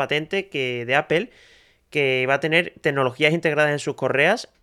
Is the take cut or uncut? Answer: uncut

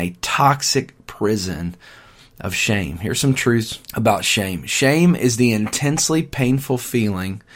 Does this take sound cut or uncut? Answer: cut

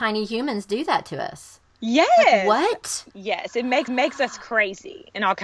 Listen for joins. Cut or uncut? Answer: cut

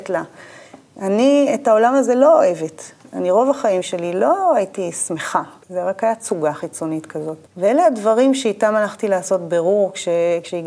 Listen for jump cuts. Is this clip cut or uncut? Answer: cut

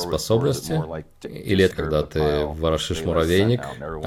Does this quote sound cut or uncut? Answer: cut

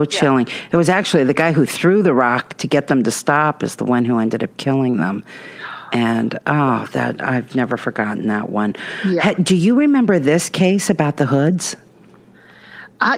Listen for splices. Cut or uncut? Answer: uncut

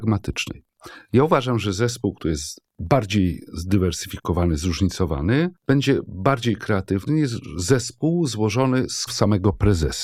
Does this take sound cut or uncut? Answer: cut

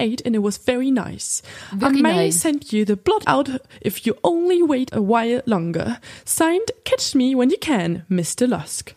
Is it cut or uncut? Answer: cut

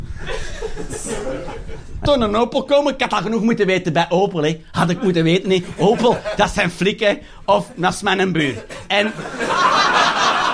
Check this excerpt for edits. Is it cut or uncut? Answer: cut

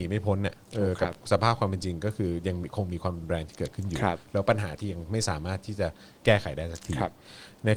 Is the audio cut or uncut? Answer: uncut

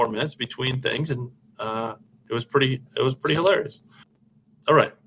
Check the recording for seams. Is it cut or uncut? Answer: uncut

